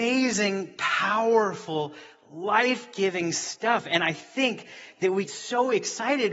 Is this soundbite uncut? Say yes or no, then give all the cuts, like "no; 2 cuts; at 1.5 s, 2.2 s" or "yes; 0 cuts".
no; 1 cut; at 5.2 s